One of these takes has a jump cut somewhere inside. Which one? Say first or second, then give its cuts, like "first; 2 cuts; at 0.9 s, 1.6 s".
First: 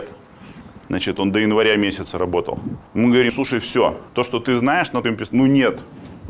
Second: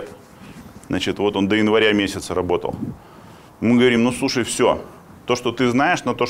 first; 5 cuts; at 1.2 s, 2.9 s, 3.3 s, 4.1 s, 5.0 s